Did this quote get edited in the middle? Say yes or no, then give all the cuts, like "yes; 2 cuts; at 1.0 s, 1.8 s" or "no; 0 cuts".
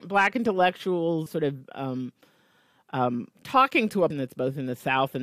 yes; 2 cuts; at 1.3 s, 4.1 s